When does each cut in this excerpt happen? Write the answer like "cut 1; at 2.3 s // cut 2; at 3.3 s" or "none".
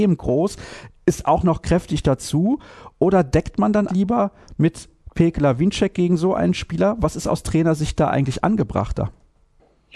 cut 1; at 3.9 s